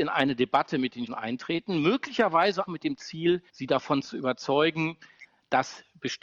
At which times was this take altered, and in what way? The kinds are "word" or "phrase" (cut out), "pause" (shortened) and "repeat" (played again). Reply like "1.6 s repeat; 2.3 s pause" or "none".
1.1 s word; 2.7 s word; 3.5 s pause